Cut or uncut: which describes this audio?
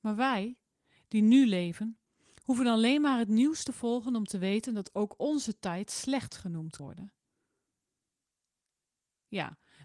cut